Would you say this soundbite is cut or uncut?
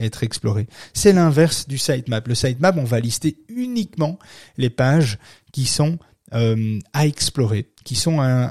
uncut